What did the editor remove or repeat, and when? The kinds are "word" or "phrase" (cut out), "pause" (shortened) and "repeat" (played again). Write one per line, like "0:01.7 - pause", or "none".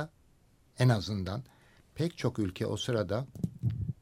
none